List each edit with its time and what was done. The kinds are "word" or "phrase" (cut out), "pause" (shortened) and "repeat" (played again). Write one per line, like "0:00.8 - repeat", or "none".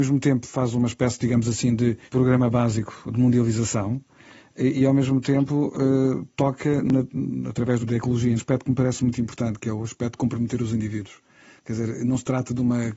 0:02.1 - pause
0:07.8 - phrase
0:08.4 - phrase